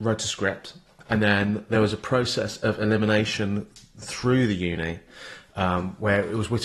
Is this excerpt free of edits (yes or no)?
yes